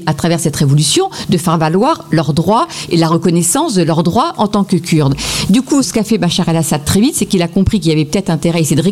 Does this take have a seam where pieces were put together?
no; 0 cuts

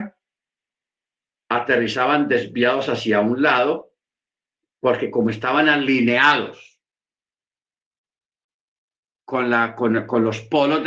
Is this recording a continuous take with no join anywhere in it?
yes; 0 cuts

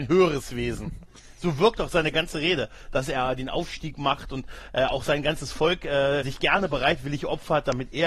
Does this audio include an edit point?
yes; 1 cut; at 6.2 s

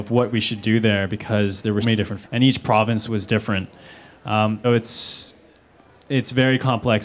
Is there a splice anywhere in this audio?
yes; 4 cuts; at 1.8 s, 2.2 s, 3.1 s, 4.6 s

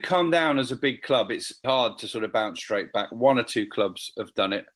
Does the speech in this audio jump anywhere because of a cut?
yes; 1 cut; at 1.6 s

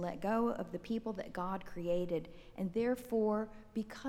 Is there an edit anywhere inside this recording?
no; 0 cuts

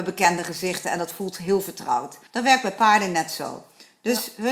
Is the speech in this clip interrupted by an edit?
yes; 1 cut; at 2.3 s

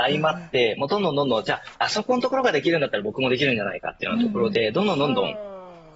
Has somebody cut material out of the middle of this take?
yes; 1 cut; at 1.7 s

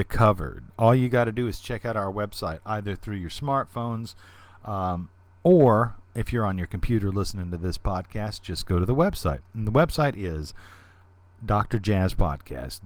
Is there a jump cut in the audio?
no; 0 cuts

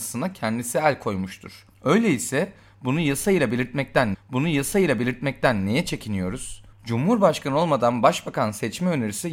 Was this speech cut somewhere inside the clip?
yes; 3 cuts; at 1.7 s, 4.1 s, 6.7 s

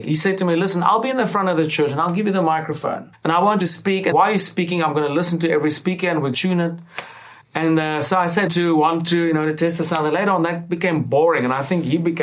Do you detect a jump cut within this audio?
yes; 6 cuts; at 3.1 s, 3.6 s, 4.1 s, 6.3 s, 7.4 s, 8.5 s

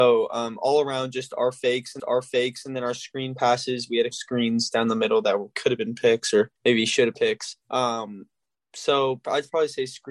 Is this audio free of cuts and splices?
no; 5 cuts; at 2.0 s, 4.1 s, 6.6 s, 7.1 s, 7.6 s

